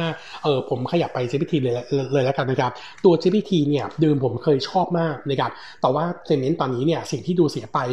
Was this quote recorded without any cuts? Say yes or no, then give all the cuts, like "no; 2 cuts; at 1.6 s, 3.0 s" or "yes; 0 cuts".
yes; 0 cuts